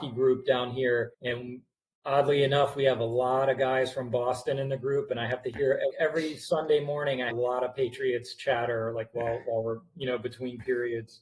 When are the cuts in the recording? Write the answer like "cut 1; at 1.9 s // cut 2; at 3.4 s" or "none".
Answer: cut 1; at 1.1 s // cut 2; at 5.9 s // cut 3; at 7.3 s